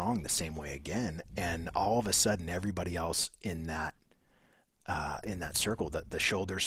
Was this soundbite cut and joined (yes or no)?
no